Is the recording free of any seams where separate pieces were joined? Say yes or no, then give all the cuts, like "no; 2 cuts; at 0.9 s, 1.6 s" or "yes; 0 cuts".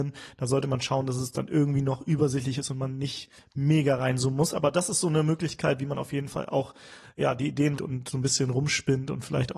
no; 1 cut; at 7.8 s